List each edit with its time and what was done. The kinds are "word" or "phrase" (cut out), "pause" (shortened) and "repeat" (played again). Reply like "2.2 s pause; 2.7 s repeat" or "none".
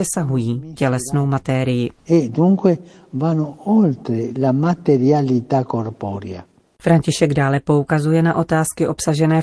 none